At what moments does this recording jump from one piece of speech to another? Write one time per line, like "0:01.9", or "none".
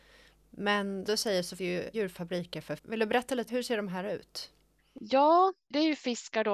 0:01.1
0:01.6
0:01.9
0:02.8
0:03.5